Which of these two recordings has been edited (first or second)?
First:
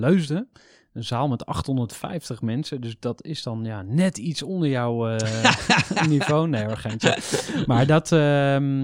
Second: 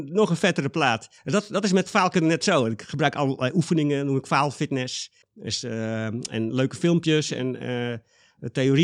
second